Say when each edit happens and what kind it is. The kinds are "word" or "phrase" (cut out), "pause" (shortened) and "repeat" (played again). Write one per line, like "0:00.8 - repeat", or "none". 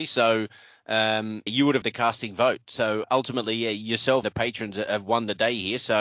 0:01.5 - word
0:01.8 - word
0:03.0 - word
0:04.2 - word

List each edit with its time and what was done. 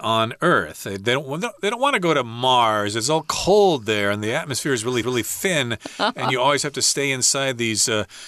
0:05.0 - repeat

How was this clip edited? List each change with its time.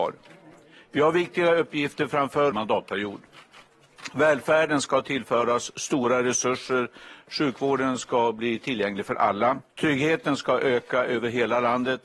0:02.5 - phrase
0:09.7 - pause

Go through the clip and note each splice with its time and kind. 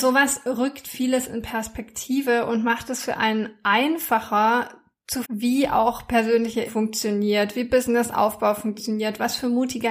0:05.2 - word
0:06.7 - word

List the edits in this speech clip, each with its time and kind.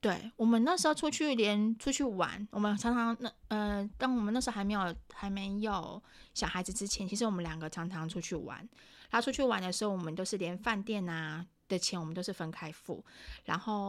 none

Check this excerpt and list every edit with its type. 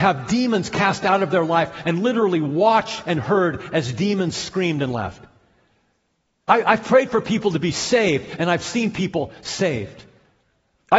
none

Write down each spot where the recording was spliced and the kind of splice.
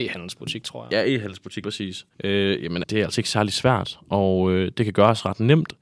0:01.6 - word
0:02.1 - pause
0:02.8 - word

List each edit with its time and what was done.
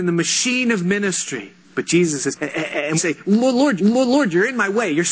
0:01.6 - pause
0:02.3 - phrase
0:03.0 - word
0:03.8 - repeat

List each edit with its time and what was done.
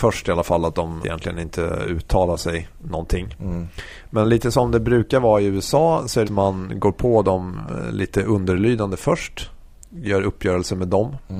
0:01.0 - phrase
0:06.2 - phrase

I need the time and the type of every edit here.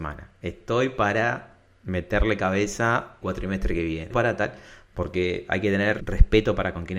0:03.2 - word
0:04.1 - word

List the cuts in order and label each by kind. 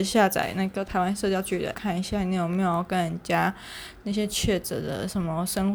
0:01.7 - word

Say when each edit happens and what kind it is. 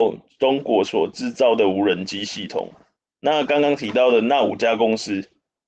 none

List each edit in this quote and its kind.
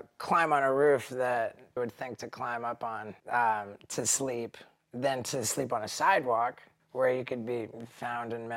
0:01.8 - word
0:03.2 - pause
0:06.8 - pause

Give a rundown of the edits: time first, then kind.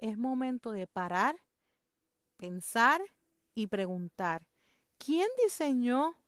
none

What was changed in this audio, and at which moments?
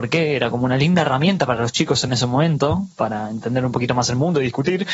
none

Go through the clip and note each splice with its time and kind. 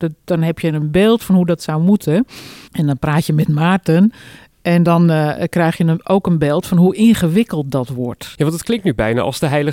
0:02.7 - pause

